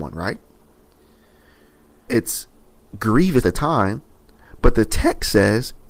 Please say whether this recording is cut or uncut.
cut